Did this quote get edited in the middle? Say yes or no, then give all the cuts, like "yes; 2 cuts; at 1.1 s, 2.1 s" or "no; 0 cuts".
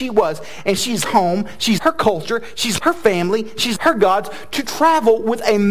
yes; 4 cuts; at 1.0 s, 1.8 s, 2.8 s, 3.8 s